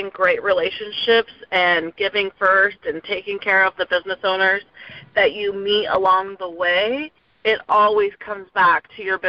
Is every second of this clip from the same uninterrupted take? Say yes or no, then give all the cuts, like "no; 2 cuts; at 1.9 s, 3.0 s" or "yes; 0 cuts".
yes; 0 cuts